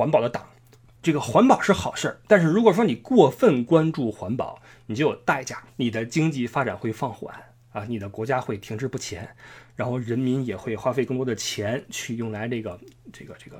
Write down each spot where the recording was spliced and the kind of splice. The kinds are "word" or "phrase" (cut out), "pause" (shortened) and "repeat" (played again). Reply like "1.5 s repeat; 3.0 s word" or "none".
5.7 s pause